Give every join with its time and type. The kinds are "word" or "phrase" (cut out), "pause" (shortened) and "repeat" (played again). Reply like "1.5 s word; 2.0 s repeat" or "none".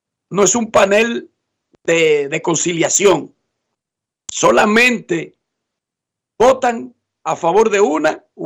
none